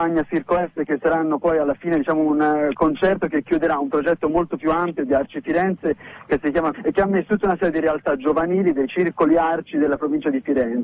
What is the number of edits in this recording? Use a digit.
2